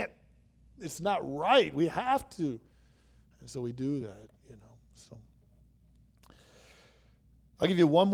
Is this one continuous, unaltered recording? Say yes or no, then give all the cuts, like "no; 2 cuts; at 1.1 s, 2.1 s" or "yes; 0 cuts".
yes; 0 cuts